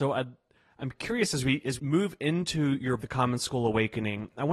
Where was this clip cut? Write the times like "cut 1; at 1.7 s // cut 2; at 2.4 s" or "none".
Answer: cut 1; at 1.8 s // cut 2; at 3.0 s